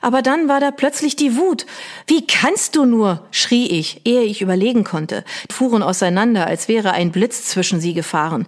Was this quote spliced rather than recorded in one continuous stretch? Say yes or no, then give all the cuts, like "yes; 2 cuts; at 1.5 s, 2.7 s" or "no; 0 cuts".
yes; 1 cut; at 5.5 s